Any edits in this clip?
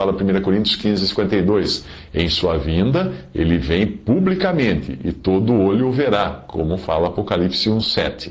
no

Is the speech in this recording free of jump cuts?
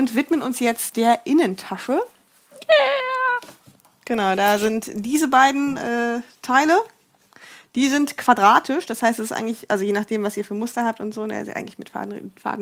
yes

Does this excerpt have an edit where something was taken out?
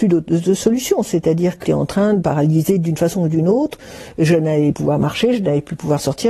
yes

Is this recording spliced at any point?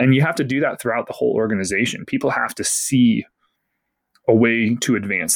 no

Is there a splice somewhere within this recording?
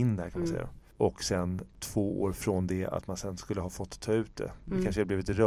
no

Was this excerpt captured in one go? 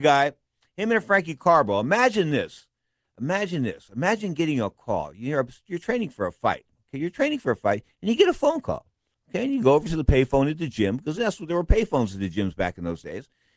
yes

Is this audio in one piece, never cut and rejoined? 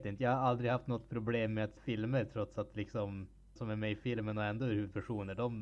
no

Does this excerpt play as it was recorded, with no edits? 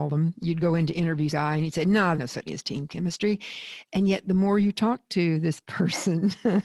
no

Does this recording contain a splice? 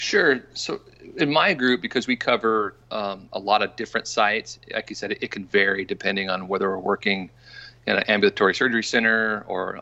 no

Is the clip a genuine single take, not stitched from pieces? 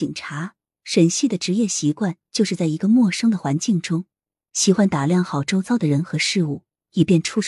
yes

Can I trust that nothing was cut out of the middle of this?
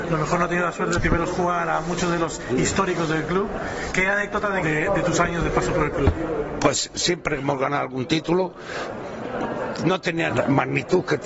no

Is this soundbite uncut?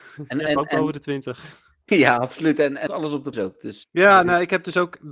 no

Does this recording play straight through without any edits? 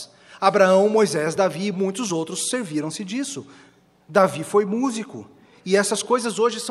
yes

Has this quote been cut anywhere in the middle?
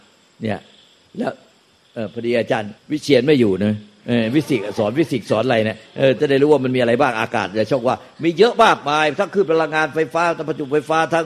yes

